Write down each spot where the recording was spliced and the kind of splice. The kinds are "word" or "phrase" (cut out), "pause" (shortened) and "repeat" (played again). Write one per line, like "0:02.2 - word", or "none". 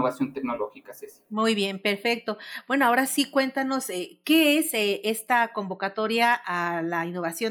none